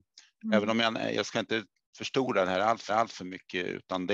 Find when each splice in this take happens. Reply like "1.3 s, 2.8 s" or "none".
1.1 s, 2.9 s